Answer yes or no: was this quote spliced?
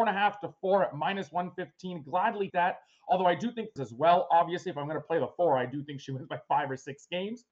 yes